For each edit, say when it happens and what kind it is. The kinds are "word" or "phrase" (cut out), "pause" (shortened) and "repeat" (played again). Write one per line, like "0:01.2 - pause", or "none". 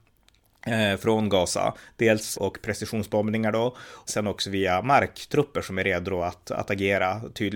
0:02.3 - phrase
0:04.1 - word